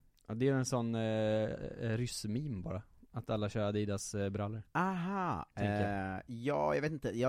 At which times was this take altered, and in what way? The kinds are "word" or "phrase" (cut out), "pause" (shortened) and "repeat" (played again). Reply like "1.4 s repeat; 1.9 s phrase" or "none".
none

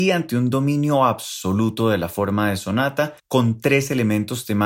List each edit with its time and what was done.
3.2 s pause

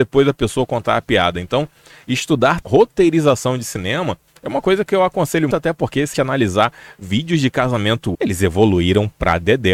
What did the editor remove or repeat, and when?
2.6 s word; 5.5 s word; 6.1 s word; 8.1 s word

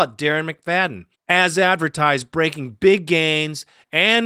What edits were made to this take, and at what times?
1.1 s pause

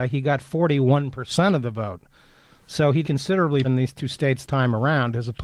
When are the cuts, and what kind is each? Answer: 3.0 s word; 3.6 s word; 4.4 s word

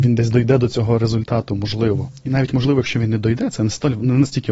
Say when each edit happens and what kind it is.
none

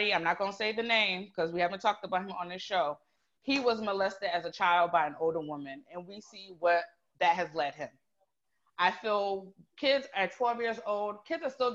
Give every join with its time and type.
none

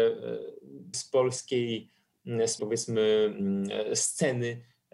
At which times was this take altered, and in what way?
0.9 s word; 2.6 s word

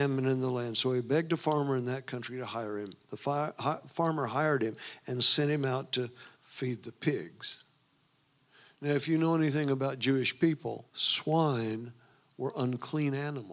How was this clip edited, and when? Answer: 6.3 s pause; 10.9 s pause

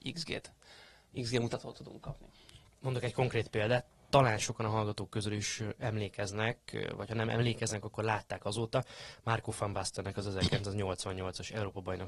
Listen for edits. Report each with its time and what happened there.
none

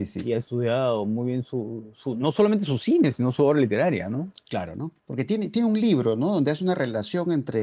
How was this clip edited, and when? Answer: 5.0 s pause

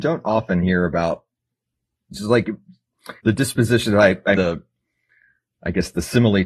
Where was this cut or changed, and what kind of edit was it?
2.1 s phrase; 3.2 s pause; 4.3 s word

